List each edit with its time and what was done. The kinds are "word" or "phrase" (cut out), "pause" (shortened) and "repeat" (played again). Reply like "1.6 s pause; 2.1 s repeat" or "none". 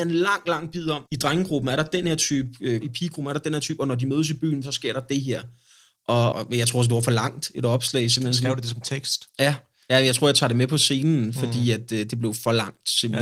1.1 s pause; 2.8 s word; 6.3 s word